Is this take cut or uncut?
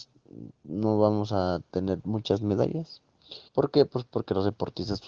cut